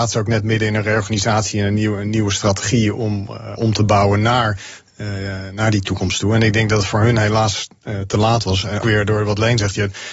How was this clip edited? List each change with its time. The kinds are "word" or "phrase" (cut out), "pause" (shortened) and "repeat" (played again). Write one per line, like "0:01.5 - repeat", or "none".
0:03.6 - word
0:08.8 - word